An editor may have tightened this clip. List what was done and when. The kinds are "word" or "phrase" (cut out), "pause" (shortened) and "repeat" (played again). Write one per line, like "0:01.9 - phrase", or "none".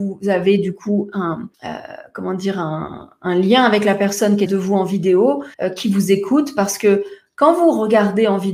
0:01.5 - pause
0:04.5 - phrase
0:05.5 - pause